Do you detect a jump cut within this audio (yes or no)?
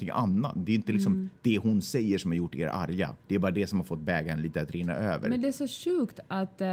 yes